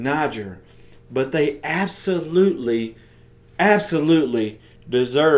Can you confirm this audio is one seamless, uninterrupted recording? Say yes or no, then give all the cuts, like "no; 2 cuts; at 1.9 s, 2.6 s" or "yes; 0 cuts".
yes; 0 cuts